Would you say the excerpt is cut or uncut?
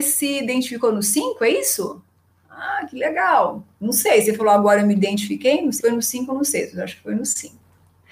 cut